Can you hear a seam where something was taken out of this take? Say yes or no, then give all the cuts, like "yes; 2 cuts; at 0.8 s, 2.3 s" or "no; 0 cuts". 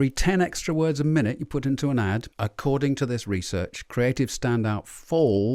yes; 1 cut; at 2.3 s